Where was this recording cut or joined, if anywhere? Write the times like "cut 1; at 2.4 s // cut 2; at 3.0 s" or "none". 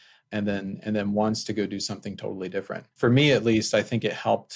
cut 1; at 2.9 s